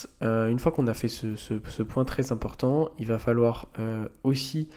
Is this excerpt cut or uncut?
uncut